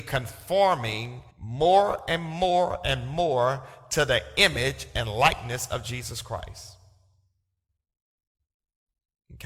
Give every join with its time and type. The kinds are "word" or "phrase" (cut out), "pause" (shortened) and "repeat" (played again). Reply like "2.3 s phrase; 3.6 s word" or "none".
1.3 s pause